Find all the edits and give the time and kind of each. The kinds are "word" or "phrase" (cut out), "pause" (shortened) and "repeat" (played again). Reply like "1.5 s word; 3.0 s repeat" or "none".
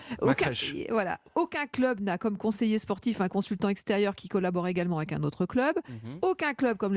none